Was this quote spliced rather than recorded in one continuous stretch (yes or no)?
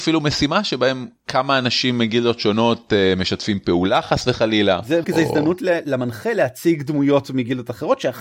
yes